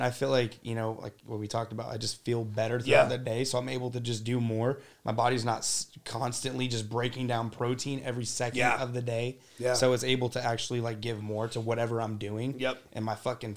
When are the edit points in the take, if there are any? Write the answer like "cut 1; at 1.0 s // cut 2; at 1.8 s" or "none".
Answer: none